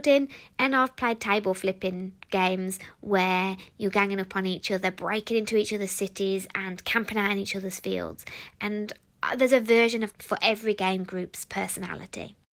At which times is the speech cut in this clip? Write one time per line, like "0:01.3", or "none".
0:10.1